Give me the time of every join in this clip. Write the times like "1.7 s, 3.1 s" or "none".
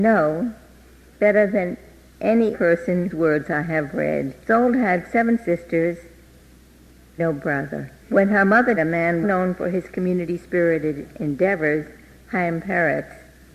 2.5 s, 3.1 s, 4.4 s, 7.2 s, 8.0 s, 8.8 s, 9.2 s

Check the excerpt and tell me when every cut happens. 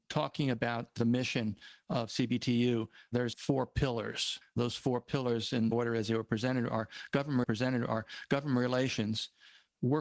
3.3 s, 4.4 s, 7.4 s

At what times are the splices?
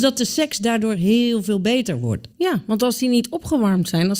2.3 s

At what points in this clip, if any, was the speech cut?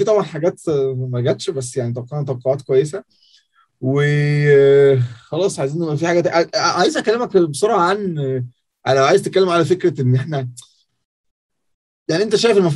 none

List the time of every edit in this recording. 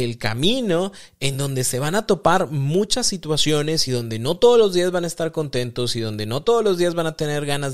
none

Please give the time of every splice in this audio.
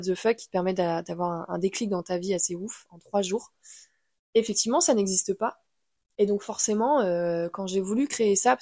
none

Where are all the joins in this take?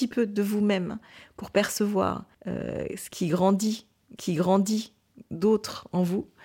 2.3 s, 4.2 s

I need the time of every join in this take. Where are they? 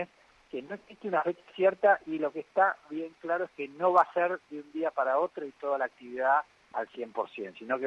none

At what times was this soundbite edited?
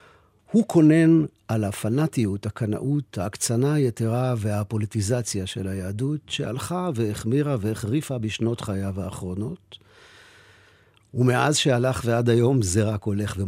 none

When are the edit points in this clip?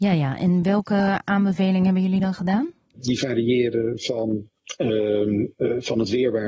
none

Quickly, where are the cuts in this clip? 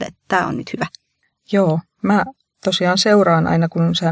none

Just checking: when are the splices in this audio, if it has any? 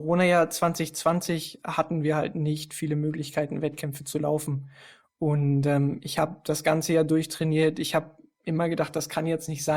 none

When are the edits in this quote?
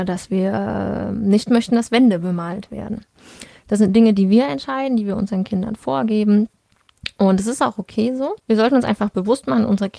8.4 s

